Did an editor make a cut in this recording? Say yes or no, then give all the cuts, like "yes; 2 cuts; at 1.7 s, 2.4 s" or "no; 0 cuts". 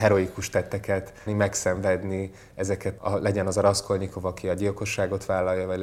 yes; 2 cuts; at 1.3 s, 3.0 s